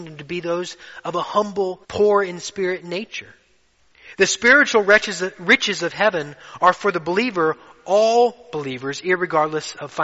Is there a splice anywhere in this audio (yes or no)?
yes